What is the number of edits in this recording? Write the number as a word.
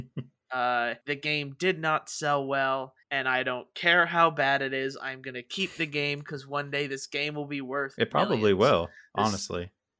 two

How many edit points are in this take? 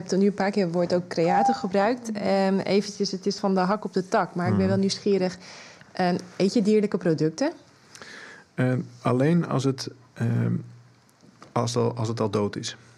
one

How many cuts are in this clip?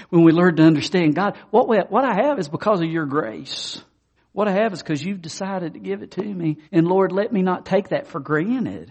two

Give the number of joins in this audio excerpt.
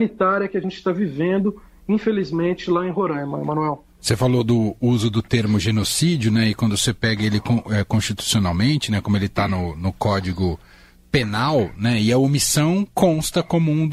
zero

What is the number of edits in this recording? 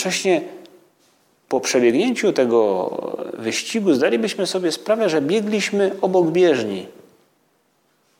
zero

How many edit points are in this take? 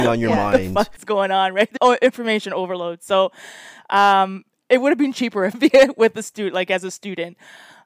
two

